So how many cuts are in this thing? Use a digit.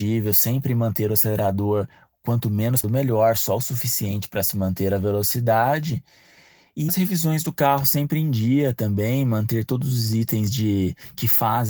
2